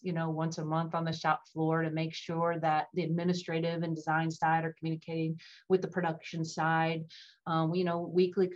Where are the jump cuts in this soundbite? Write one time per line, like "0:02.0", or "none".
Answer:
none